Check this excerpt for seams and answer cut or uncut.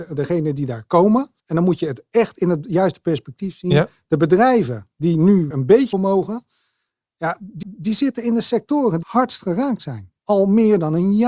cut